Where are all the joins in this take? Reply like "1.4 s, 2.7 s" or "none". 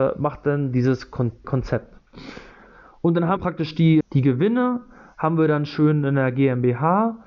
1.4 s, 3.4 s, 4.0 s